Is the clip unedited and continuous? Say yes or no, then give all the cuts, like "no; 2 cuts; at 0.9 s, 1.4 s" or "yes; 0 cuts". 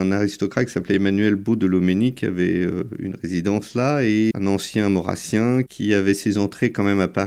no; 1 cut; at 4.3 s